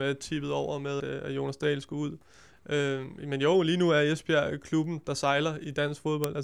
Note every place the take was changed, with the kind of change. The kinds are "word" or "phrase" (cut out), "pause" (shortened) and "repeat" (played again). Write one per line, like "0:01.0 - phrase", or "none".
0:01.0 - word